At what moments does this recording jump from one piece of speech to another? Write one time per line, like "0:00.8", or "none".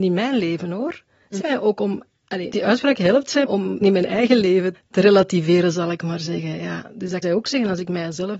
0:01.4
0:02.5
0:03.4
0:03.8
0:04.7
0:07.2